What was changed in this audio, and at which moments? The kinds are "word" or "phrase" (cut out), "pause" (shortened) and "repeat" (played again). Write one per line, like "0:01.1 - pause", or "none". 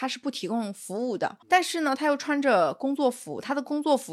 0:01.4 - pause